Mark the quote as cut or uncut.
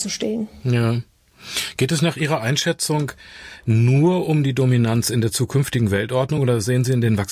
uncut